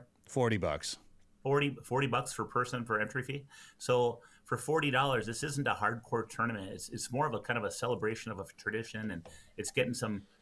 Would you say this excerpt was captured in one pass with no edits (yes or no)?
yes